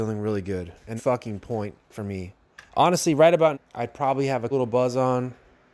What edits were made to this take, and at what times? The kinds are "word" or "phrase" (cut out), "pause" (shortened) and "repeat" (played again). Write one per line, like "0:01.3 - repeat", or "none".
0:01.0 - phrase
0:01.8 - pause
0:02.7 - pause
0:03.5 - word
0:04.5 - word